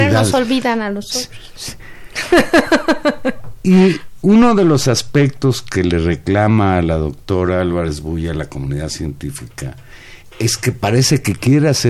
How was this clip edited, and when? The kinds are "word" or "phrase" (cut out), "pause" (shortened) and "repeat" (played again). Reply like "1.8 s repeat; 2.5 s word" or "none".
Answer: none